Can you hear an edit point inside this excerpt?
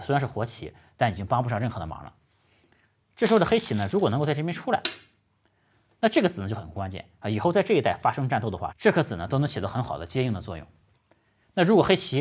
no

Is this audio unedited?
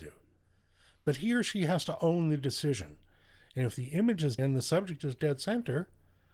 no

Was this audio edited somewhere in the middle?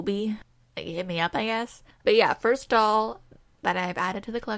no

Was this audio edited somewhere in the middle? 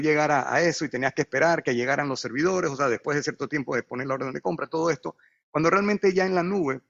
no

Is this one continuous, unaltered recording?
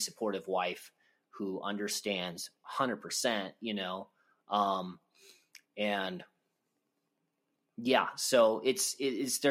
yes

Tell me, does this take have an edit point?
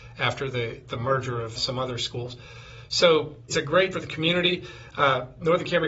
yes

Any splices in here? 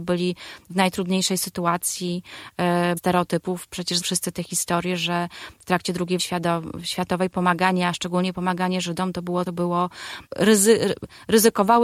yes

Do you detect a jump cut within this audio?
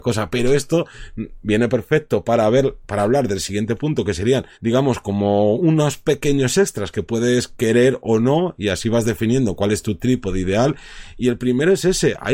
yes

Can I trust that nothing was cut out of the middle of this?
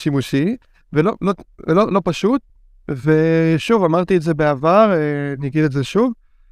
yes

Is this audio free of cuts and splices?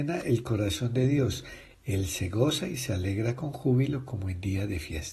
yes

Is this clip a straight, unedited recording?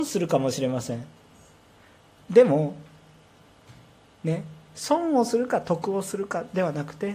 yes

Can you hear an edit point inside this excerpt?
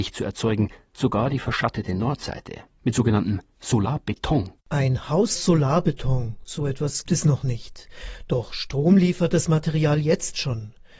yes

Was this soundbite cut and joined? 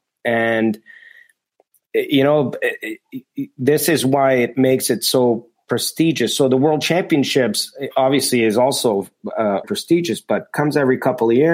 yes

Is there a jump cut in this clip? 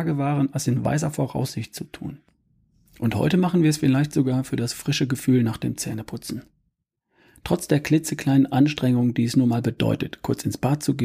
no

